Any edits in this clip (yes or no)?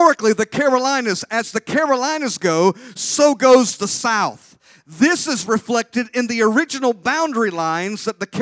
no